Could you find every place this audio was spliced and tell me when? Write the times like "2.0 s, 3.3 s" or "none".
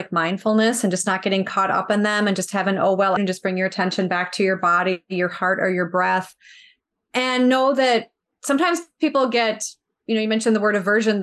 3.2 s